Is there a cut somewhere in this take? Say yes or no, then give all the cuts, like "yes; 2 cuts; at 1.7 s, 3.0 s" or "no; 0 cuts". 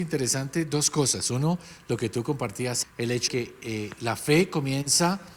yes; 2 cuts; at 2.8 s, 3.3 s